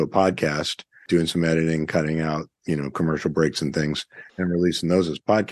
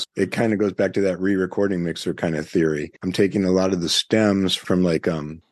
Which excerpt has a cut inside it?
second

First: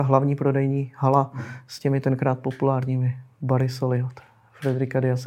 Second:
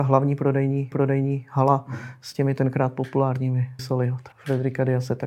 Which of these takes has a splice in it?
second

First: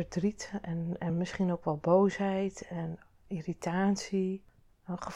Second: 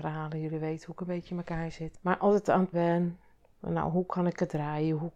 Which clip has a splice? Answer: second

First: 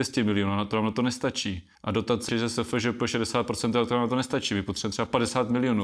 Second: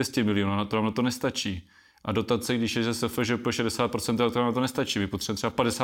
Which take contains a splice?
first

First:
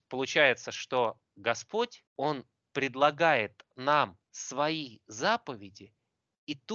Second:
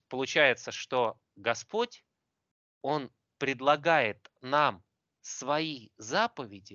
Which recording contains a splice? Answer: first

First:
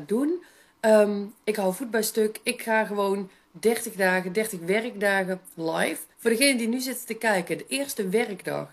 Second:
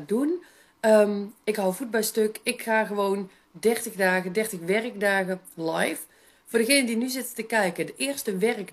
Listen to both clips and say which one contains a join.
first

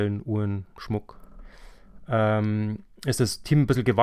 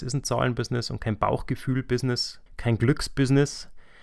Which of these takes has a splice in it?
second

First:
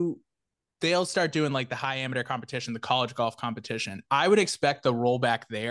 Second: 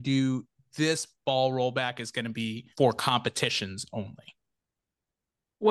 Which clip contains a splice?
second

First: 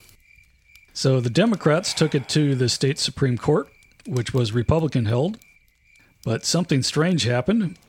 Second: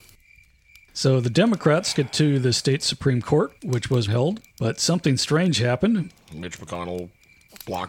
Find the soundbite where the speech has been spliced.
second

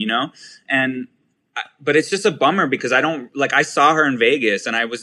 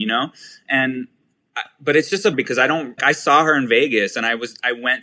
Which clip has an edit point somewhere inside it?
second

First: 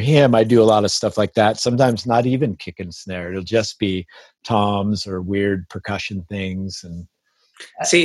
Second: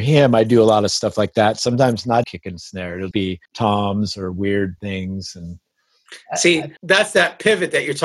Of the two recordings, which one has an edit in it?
second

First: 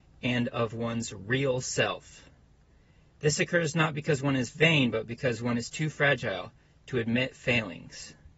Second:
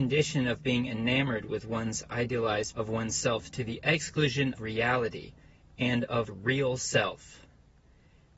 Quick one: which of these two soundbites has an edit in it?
second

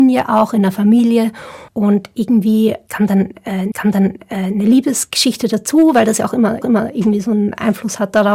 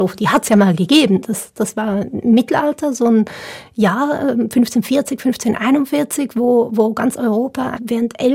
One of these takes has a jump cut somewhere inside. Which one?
first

